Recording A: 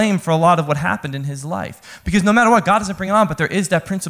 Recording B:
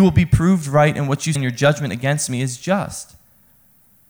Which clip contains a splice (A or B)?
B